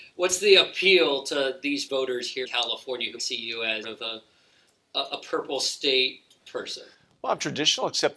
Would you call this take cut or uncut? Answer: cut